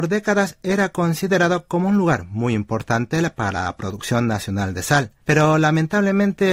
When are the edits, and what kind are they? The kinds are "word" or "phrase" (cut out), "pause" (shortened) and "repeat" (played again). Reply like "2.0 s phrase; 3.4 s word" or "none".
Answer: 5.2 s pause